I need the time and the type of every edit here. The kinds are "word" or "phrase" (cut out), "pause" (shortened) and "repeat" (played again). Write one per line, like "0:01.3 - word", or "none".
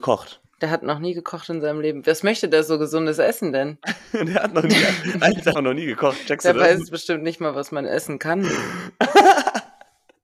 0:05.5 - phrase